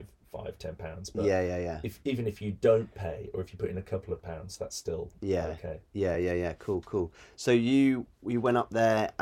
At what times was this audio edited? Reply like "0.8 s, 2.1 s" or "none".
none